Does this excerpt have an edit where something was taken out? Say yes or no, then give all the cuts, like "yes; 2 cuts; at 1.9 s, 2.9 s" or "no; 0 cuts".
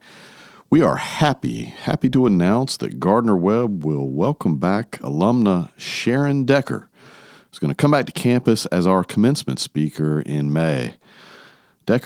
no; 0 cuts